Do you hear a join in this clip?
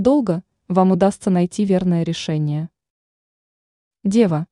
no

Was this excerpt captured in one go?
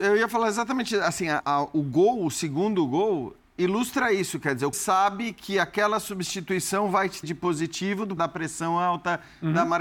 no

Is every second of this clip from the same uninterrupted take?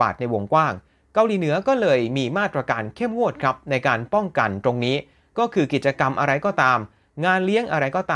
yes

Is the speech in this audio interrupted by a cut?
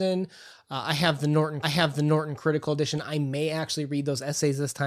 yes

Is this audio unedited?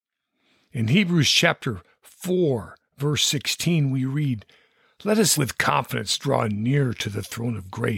no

